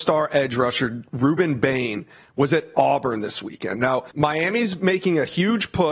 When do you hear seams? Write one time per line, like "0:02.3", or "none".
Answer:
0:04.1

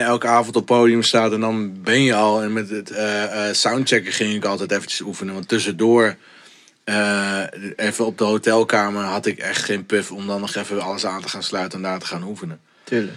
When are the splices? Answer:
none

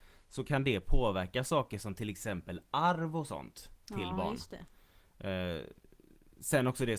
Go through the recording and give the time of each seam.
none

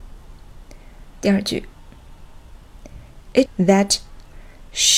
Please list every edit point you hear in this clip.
0:01.1
0:03.5

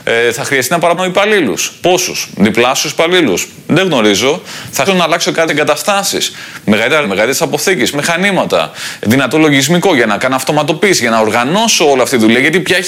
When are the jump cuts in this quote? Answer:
0:01.0
0:04.9
0:05.5
0:07.0
0:07.9
0:09.0

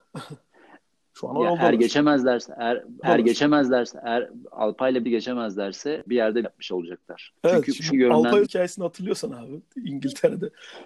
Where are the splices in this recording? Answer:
0:03.0
0:05.0
0:06.1
0:06.4
0:07.4
0:07.9
0:08.4

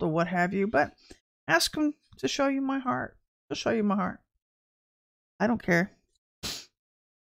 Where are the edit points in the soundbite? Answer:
none

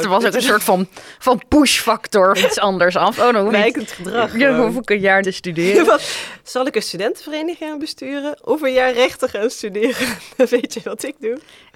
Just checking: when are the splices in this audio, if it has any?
0:01.2
0:02.3
0:03.5
0:05.2

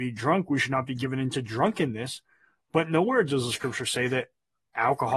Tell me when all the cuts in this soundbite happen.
none

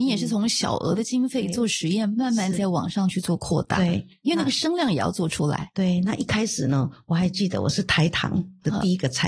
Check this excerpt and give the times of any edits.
none

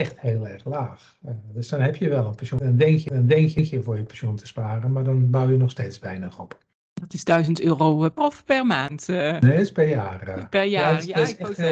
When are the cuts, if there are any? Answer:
0:06.7
0:08.2

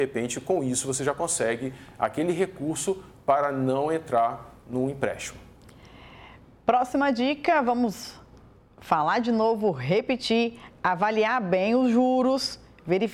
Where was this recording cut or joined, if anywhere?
none

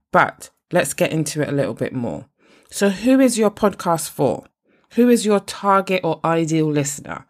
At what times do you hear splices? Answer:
none

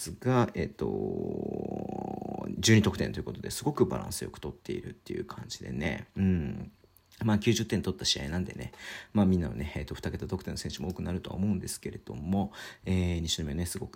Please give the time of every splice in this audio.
none

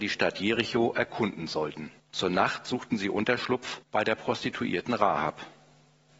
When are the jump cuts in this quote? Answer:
0:02.0
0:03.8

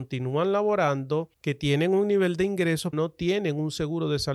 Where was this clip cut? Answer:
0:01.3
0:02.9

